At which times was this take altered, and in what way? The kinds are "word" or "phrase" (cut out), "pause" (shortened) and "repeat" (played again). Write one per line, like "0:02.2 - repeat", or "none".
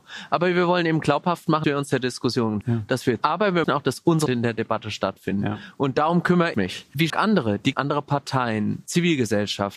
0:01.6 - word
0:02.6 - word
0:03.2 - word
0:03.6 - word
0:04.3 - word
0:06.5 - word
0:07.1 - word
0:07.7 - word